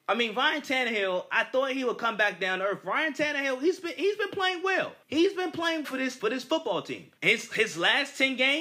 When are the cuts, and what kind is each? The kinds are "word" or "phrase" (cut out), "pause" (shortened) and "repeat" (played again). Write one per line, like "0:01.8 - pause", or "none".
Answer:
0:05.0 - pause
0:05.8 - word
0:06.2 - word
0:07.2 - pause